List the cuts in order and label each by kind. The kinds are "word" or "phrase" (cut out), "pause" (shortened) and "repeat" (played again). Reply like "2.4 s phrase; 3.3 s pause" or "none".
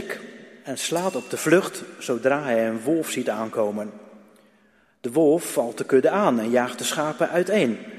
none